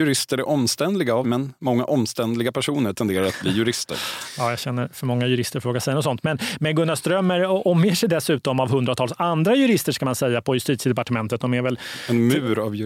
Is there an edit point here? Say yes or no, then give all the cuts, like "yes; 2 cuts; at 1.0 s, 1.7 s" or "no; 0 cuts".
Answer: yes; 1 cut; at 1.2 s